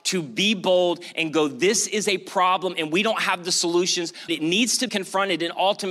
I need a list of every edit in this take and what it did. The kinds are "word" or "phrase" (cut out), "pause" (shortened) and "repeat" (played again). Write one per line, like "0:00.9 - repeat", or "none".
0:04.3 - word
0:04.9 - word